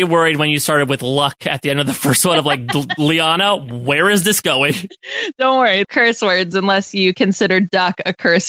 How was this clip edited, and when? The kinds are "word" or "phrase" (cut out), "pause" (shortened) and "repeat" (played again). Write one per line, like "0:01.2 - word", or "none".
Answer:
0:05.8 - phrase